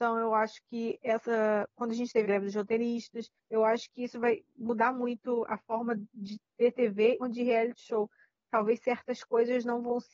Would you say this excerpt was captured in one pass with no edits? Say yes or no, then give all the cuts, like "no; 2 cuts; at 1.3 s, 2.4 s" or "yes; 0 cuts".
no; 3 cuts; at 2.2 s, 3.4 s, 7.2 s